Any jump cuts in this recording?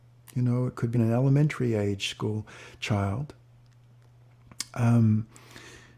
yes; 1 cut; at 0.9 s

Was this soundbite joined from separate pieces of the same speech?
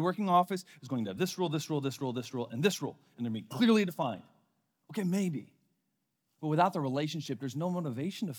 no; 0 cuts

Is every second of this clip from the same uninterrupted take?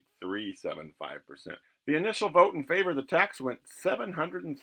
no; 1 cut; at 1.6 s

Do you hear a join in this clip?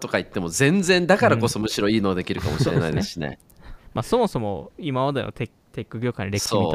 no; 0 cuts

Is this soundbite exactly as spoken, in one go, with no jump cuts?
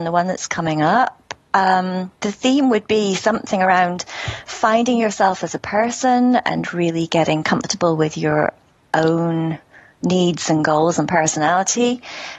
yes; 0 cuts

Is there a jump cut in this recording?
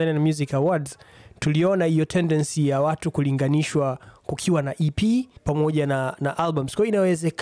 yes; 1 cut; at 5.4 s

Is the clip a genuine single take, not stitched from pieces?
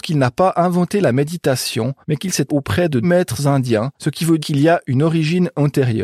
no; 5 cuts; at 2.0 s, 2.5 s, 3.0 s, 3.9 s, 4.4 s

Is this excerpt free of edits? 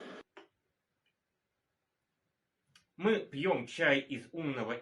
yes; 0 cuts

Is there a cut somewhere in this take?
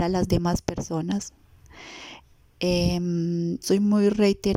yes; 1 cut; at 3.6 s

